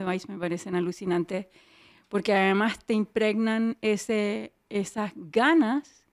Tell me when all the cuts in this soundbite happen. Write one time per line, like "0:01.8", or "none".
none